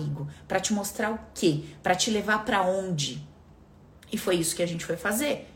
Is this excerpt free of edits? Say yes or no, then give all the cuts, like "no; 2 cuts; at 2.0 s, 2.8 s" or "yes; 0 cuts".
yes; 0 cuts